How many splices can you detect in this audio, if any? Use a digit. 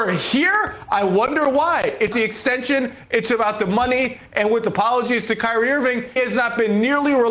2